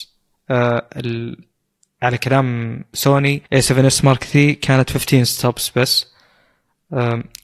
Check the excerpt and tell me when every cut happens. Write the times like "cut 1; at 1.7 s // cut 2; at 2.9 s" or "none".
cut 1; at 3.5 s